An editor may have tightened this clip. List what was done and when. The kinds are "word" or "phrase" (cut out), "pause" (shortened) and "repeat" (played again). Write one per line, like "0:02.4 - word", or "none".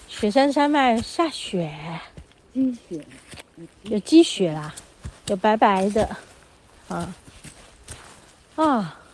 0:05.2 - pause

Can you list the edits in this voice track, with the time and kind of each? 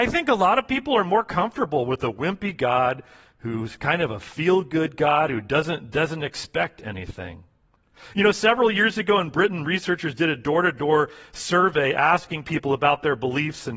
0:05.9 - phrase

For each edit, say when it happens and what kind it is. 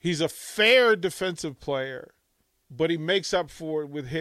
0:02.4 - pause

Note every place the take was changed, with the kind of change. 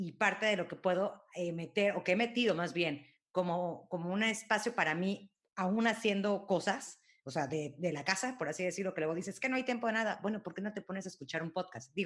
none

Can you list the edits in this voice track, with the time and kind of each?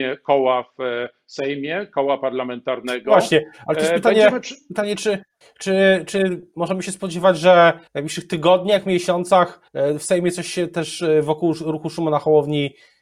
0:05.4 - pause
0:07.9 - pause
0:09.7 - pause

